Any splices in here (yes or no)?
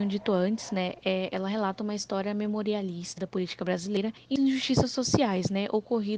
yes